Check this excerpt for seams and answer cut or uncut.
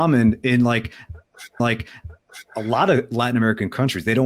cut